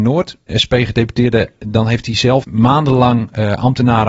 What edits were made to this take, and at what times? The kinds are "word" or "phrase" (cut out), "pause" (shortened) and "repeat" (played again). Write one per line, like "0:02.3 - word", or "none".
0:02.4 - word